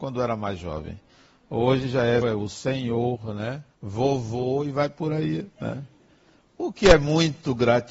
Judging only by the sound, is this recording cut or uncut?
cut